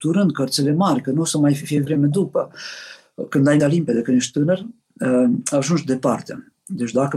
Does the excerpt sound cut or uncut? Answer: cut